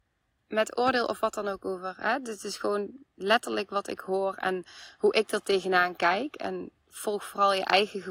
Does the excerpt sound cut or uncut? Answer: uncut